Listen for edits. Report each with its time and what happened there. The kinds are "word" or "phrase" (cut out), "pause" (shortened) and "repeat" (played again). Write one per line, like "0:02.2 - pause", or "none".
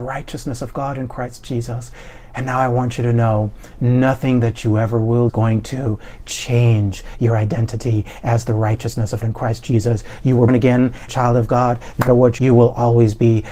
0:05.3 - phrase
0:09.2 - word
0:10.5 - word
0:11.1 - phrase
0:12.1 - word
0:12.4 - phrase